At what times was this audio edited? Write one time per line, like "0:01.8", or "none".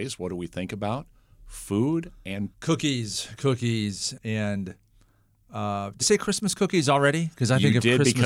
0:02.5
0:03.4
0:04.2
0:06.0